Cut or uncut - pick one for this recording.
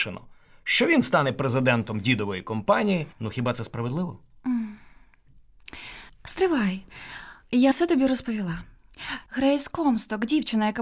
cut